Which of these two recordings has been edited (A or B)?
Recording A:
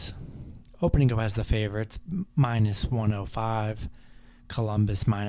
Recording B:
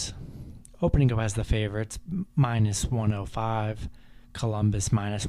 B